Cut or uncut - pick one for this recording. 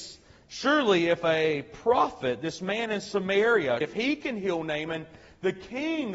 cut